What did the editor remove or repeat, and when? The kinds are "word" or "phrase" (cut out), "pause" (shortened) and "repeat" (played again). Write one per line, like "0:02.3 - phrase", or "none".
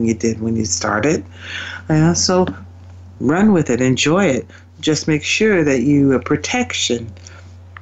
none